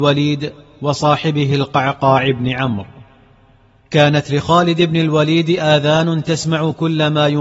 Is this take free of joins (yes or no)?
yes